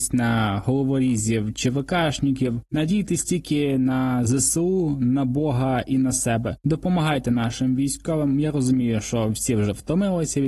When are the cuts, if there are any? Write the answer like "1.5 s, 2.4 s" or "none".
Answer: none